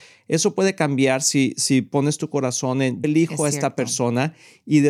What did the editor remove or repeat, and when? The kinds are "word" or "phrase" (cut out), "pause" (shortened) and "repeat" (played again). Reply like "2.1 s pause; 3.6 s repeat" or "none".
3.0 s word